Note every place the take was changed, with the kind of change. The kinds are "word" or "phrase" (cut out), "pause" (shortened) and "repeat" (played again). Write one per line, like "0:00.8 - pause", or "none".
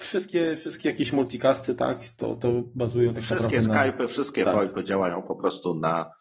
none